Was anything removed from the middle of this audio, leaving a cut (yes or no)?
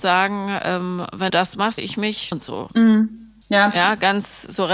yes